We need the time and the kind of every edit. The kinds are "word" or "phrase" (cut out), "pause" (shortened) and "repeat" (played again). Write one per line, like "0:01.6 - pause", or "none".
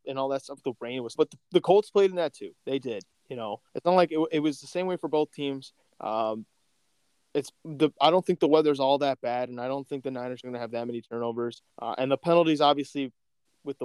0:01.2 - word
0:02.6 - pause
0:03.7 - pause
0:05.9 - pause
0:07.6 - pause
0:11.7 - pause